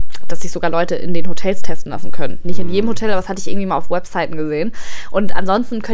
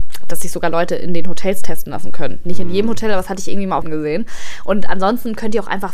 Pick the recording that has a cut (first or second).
second